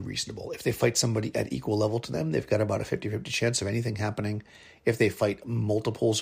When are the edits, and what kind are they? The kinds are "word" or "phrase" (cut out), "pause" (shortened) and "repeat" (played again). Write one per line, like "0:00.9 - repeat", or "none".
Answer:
none